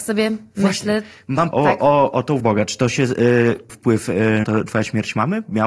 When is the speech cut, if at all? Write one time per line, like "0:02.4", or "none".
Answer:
0:01.5
0:02.4
0:03.7
0:04.4